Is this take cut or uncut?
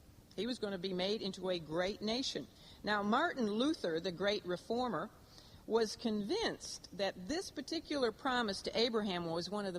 uncut